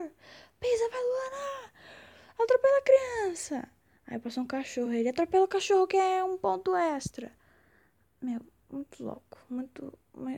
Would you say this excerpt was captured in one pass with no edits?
yes; 0 cuts

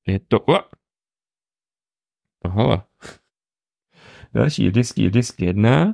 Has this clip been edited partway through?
yes; 1 cut; at 5.0 s

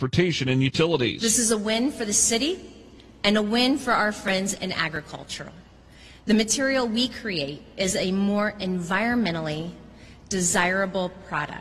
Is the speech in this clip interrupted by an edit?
no; 0 cuts

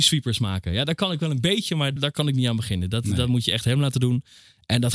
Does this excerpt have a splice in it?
yes; 1 cut; at 2.0 s

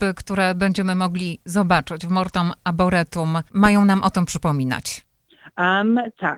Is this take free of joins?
no; 1 cut; at 3.5 s

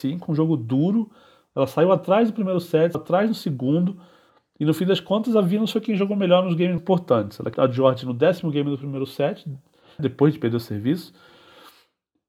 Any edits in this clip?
yes; 4 cuts; at 2.9 s, 6.8 s, 7.5 s, 10.0 s

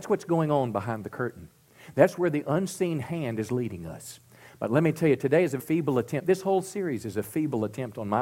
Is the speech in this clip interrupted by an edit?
yes; 1 cut; at 5.6 s

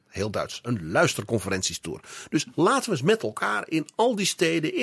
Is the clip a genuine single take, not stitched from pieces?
yes; 0 cuts

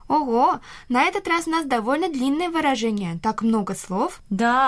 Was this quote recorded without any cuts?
yes; 0 cuts

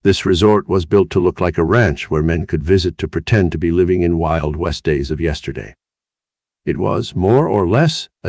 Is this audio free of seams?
yes; 0 cuts

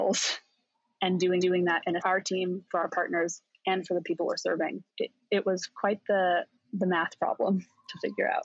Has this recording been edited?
yes; 3 cuts; at 1.4 s, 2.0 s, 4.9 s

